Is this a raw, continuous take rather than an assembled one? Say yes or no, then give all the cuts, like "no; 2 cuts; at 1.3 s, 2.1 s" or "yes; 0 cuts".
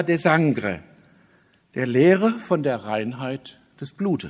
yes; 0 cuts